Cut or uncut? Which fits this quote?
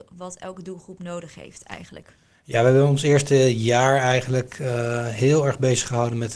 uncut